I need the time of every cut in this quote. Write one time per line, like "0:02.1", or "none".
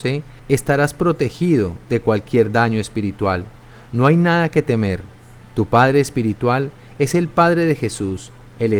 none